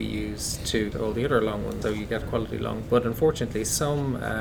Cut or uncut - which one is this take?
cut